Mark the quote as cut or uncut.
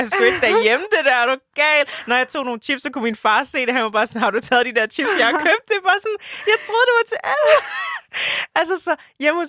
uncut